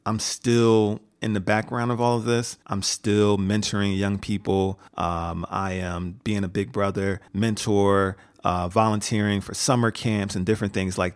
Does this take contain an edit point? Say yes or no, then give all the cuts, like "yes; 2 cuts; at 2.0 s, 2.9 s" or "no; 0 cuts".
yes; 3 cuts; at 2.6 s, 4.9 s, 7.3 s